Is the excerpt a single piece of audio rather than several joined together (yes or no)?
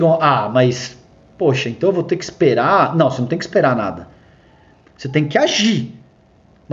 yes